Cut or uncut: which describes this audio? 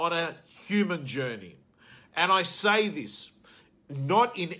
uncut